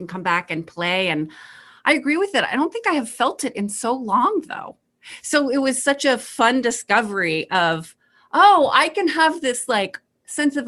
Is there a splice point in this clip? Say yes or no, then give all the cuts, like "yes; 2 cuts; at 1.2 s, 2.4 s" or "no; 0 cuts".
no; 0 cuts